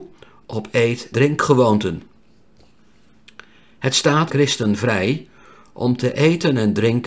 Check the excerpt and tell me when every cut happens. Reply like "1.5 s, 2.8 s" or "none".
1.1 s, 4.3 s